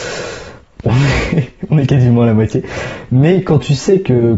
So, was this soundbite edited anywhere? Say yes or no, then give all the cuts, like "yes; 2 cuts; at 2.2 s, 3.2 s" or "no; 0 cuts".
no; 0 cuts